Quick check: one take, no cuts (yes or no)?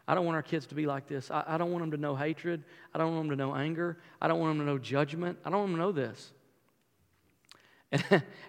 yes